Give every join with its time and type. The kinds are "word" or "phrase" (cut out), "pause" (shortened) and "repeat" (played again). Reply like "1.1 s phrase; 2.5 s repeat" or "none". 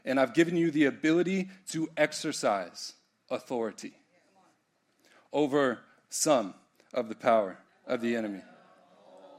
none